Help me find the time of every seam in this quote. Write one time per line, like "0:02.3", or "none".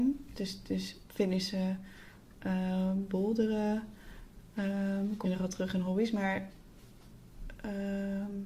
0:05.2